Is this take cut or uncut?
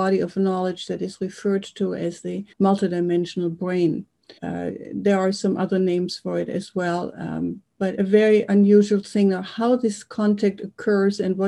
cut